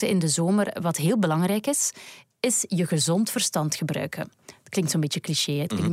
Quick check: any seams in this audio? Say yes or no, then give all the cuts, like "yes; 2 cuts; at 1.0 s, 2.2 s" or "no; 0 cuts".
no; 0 cuts